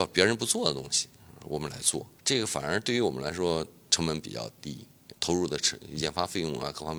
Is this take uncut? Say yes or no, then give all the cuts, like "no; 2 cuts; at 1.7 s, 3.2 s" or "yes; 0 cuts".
no; 2 cuts; at 2.2 s, 5.1 s